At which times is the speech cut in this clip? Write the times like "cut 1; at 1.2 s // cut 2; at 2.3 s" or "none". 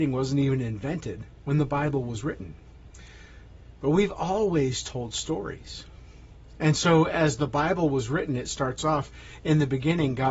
none